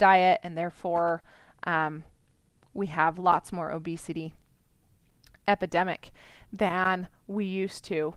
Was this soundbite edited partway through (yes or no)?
no